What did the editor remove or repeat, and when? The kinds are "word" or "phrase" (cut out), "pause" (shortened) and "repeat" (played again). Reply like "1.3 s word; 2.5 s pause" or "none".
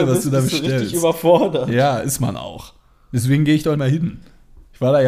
3.7 s word